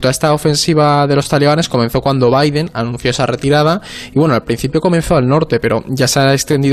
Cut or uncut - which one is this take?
uncut